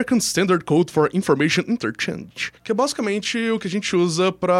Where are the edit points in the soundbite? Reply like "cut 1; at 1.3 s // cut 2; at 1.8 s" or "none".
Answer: cut 1; at 2.6 s